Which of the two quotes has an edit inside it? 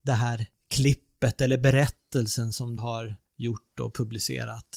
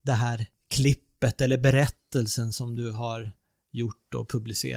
first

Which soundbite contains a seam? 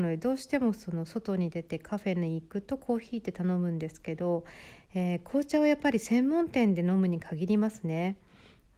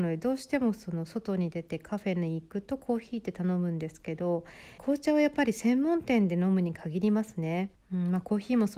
second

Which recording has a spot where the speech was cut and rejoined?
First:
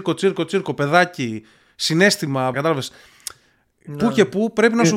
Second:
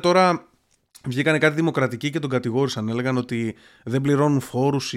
first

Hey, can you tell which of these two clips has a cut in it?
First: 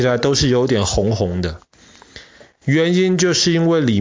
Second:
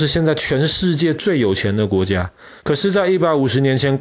second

